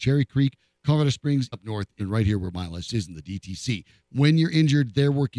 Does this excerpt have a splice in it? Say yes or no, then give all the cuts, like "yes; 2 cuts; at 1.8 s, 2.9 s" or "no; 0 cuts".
yes; 3 cuts; at 1.5 s, 2.0 s, 2.9 s